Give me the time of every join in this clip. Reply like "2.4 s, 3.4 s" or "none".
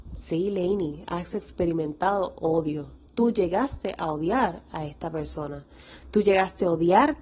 3.1 s